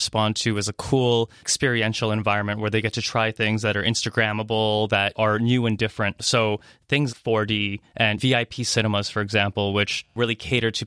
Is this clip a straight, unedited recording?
no; 1 cut; at 7.1 s

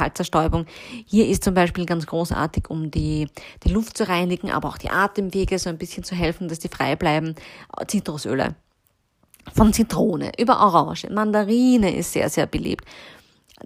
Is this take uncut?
yes; 0 cuts

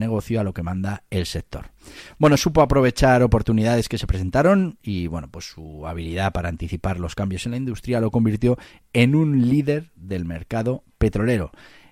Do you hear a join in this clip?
no; 0 cuts

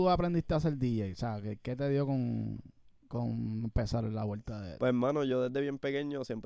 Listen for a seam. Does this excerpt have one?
no; 0 cuts

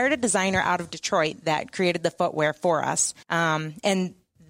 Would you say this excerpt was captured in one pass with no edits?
no; 1 cut; at 3.2 s

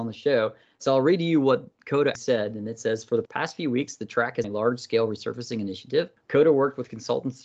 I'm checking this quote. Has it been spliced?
yes; 2 cuts; at 2.1 s, 4.4 s

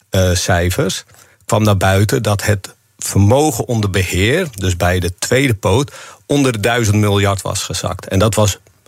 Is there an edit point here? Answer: no; 0 cuts

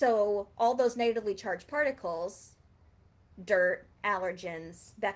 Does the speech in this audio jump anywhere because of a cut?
no; 0 cuts

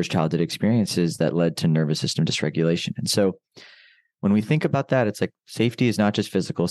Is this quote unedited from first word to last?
yes; 0 cuts

